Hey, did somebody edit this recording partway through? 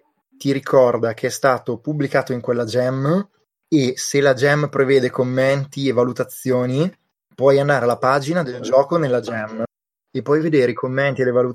no; 0 cuts

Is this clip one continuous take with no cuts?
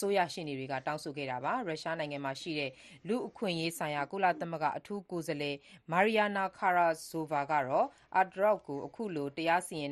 yes; 0 cuts

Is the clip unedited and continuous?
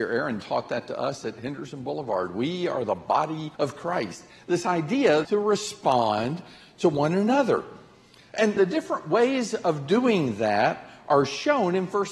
no; 3 cuts; at 3.5 s, 5.2 s, 8.6 s

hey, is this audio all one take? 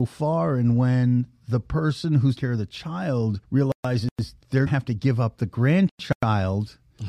no; 3 cuts; at 2.4 s, 3.4 s, 4.7 s

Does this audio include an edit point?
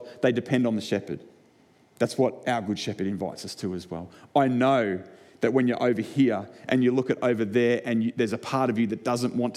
no; 0 cuts

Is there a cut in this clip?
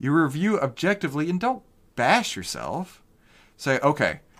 no; 0 cuts

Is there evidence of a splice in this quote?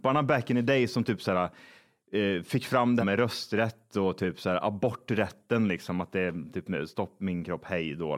yes; 1 cut; at 3.0 s

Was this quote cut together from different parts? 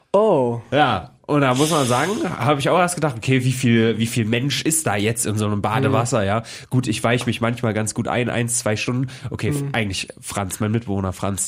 no; 0 cuts

